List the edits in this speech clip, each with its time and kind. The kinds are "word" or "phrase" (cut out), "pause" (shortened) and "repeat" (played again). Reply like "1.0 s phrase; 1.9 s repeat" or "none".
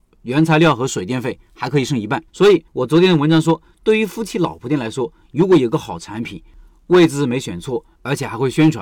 2.3 s pause; 2.7 s pause